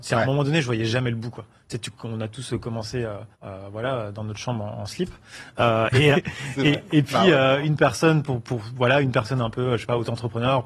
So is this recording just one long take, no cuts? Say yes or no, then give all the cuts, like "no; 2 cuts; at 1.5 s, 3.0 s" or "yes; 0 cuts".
no; 2 cuts; at 3.3 s, 6.1 s